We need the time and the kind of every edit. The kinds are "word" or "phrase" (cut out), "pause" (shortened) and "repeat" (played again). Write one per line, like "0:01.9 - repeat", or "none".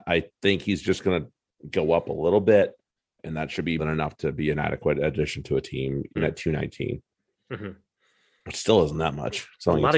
0:03.8 - word
0:06.2 - word